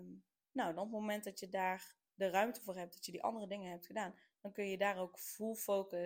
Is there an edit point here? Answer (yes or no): no